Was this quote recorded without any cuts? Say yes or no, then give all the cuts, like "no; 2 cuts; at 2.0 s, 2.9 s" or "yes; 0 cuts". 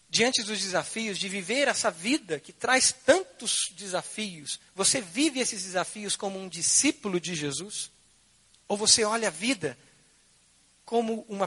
no; 1 cut; at 4.7 s